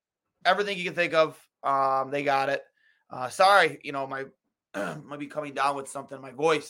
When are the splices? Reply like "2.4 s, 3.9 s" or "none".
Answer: none